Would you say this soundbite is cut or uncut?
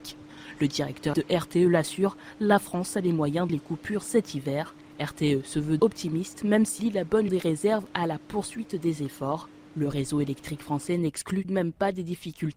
cut